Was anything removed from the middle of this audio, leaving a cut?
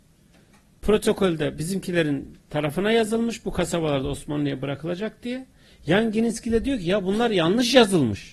no; 0 cuts

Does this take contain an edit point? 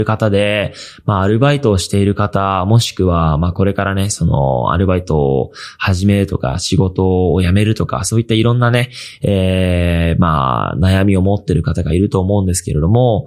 no; 0 cuts

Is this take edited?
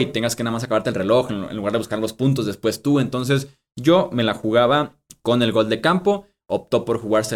no; 0 cuts

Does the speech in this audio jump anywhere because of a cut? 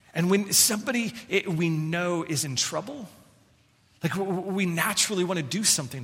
no; 0 cuts

